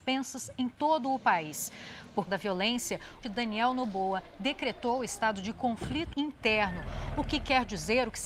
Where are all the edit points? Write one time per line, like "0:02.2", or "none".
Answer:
0:02.3
0:03.2
0:06.1

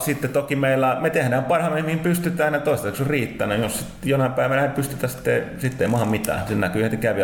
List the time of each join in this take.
none

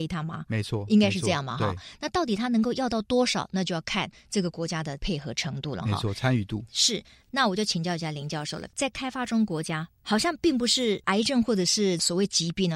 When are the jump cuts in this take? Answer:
0:09.9

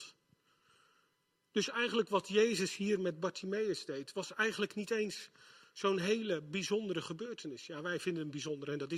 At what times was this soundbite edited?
none

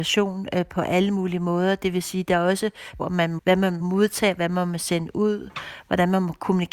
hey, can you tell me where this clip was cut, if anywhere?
0:03.0
0:03.4
0:03.8

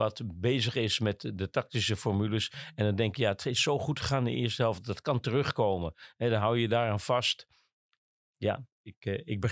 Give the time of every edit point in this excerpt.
none

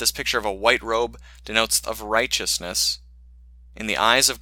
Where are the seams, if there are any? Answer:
0:01.8

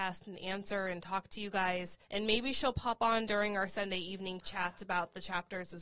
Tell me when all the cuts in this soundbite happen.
0:02.0

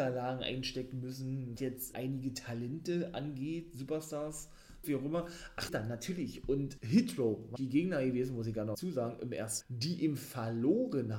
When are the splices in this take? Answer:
0:01.6
0:01.9
0:04.8
0:05.7
0:06.8
0:07.6
0:08.7
0:09.6

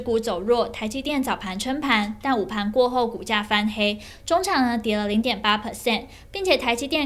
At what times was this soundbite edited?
none

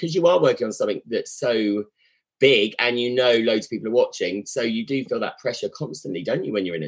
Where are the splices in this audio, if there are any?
none

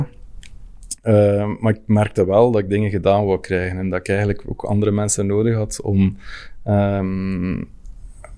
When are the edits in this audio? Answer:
none

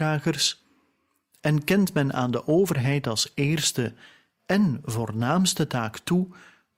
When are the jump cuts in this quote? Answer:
none

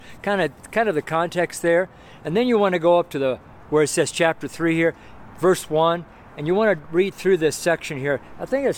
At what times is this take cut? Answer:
none

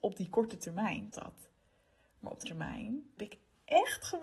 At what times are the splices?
0:01.1
0:02.4
0:03.2

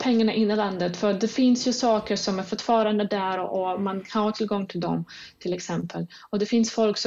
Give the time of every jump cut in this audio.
none

